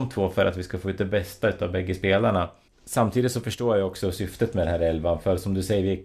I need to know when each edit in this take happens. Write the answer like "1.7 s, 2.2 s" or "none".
2.7 s